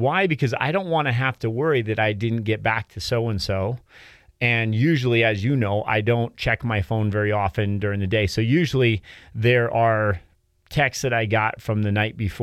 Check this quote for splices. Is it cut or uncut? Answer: uncut